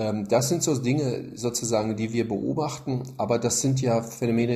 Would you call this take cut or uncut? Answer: uncut